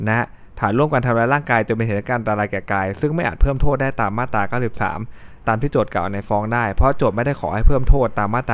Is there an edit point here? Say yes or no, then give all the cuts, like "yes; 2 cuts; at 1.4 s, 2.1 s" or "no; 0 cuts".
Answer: yes; 1 cut; at 5.4 s